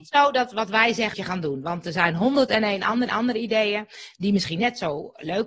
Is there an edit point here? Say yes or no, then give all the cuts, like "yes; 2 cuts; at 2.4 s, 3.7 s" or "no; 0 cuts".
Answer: yes; 2 cuts; at 1.1 s, 3.1 s